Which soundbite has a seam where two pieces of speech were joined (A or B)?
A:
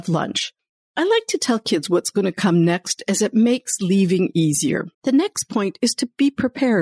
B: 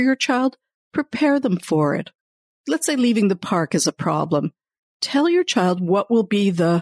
A